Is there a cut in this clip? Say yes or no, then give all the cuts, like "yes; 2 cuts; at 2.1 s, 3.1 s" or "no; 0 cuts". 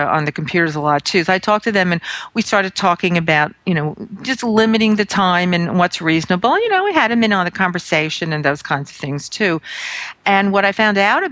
no; 0 cuts